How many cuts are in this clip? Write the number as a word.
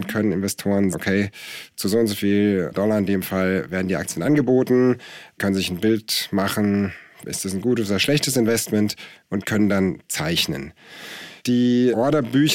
two